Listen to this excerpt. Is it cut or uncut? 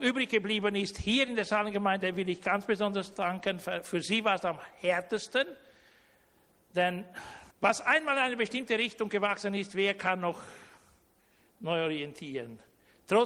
cut